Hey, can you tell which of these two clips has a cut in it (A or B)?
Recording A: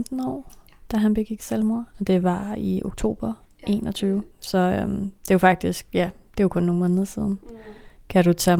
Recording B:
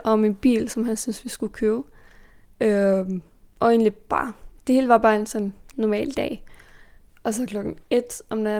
A